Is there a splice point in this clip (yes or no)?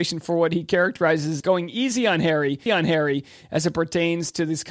yes